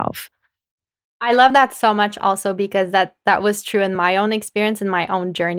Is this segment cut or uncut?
uncut